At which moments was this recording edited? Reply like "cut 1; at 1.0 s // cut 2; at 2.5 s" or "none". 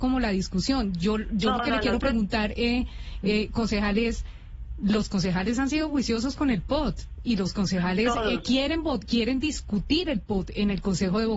none